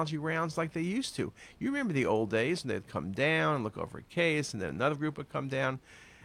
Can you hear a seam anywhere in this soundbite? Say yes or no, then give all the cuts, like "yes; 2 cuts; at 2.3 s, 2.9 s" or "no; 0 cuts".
no; 0 cuts